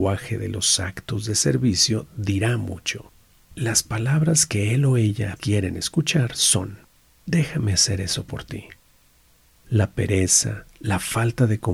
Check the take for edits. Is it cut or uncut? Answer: cut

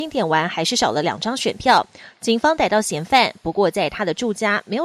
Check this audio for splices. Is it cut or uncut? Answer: uncut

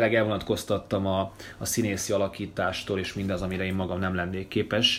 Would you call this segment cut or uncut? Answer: uncut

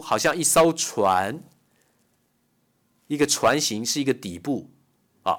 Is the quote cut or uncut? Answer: uncut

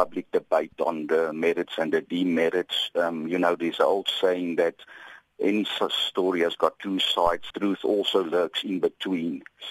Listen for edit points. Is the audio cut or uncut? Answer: cut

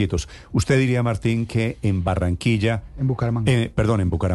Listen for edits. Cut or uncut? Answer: uncut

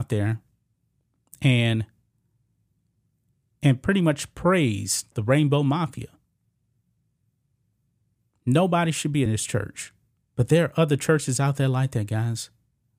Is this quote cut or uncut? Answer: cut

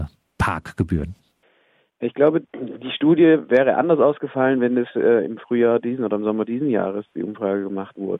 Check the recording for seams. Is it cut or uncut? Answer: cut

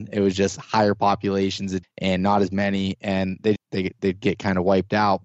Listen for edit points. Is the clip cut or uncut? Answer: cut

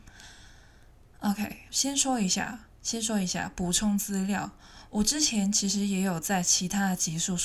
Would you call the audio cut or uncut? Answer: cut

